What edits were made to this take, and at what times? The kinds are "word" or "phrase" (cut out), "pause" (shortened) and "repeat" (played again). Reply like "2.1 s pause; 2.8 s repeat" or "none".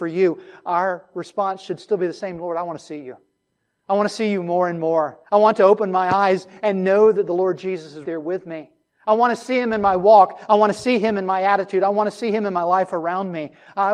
5.3 s pause; 8.0 s word

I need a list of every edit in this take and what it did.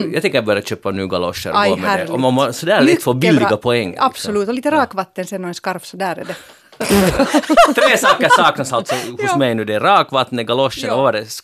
none

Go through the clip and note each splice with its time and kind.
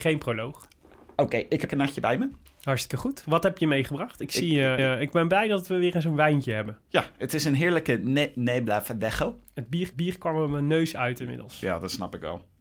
1.7 s phrase; 4.8 s repeat; 9.9 s repeat

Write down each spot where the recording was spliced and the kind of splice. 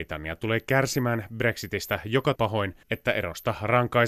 2.4 s phrase; 2.8 s pause

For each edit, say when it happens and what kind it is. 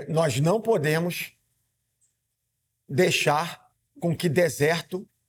none

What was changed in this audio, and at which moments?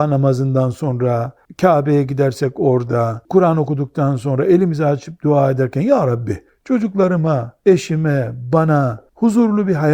none

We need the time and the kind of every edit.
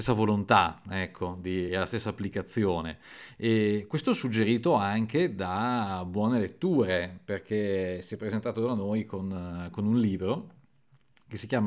none

